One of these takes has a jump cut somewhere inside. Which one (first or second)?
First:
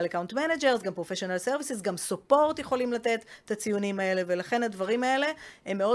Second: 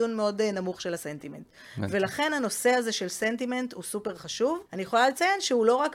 second